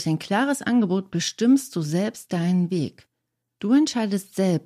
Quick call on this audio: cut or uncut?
uncut